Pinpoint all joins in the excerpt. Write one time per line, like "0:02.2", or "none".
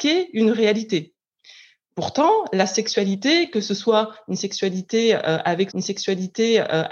0:05.7